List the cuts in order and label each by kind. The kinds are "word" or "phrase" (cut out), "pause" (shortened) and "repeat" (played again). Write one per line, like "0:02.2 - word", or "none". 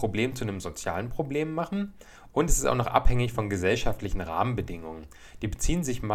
none